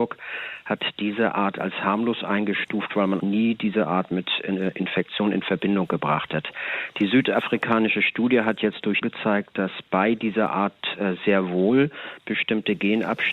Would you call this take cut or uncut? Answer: cut